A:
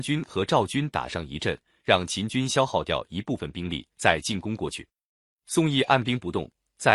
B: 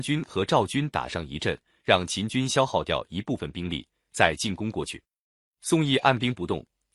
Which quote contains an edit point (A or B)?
A